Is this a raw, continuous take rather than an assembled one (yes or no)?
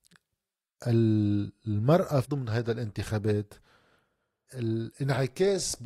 no